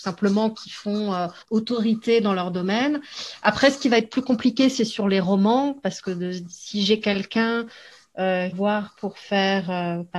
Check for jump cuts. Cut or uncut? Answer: cut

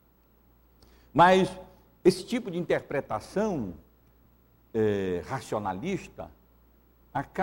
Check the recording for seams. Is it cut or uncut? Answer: uncut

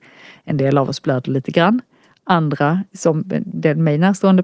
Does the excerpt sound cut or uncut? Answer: uncut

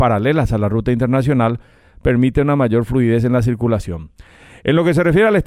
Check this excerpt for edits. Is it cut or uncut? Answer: uncut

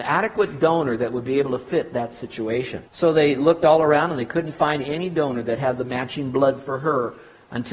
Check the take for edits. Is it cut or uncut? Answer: cut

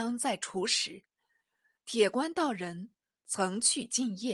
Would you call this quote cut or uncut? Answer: uncut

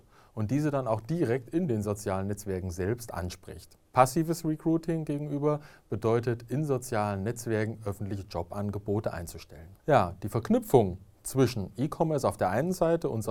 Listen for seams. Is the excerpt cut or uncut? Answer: cut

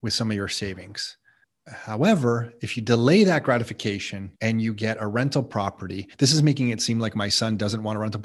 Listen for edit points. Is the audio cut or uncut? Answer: cut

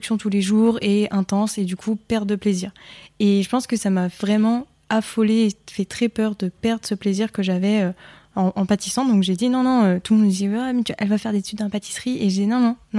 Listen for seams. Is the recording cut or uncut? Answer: uncut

